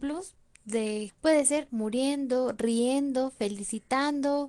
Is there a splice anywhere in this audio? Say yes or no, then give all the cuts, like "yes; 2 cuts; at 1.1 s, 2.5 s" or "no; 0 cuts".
yes; 2 cuts; at 1.1 s, 1.7 s